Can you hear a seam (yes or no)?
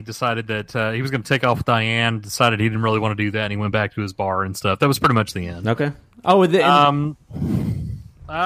no